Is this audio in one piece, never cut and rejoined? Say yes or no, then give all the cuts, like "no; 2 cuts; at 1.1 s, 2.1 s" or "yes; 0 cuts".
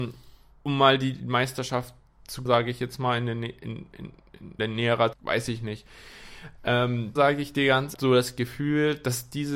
no; 5 cuts; at 2.5 s, 4.6 s, 5.1 s, 7.2 s, 7.9 s